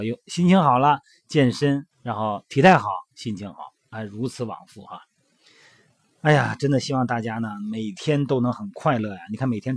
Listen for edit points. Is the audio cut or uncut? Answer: cut